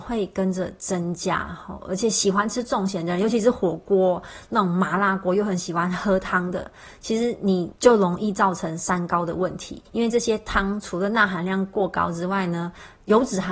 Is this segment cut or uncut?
cut